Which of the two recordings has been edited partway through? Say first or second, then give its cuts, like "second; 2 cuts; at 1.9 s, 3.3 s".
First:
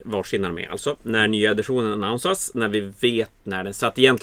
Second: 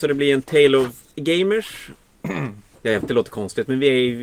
second; 2 cuts; at 1.1 s, 3.0 s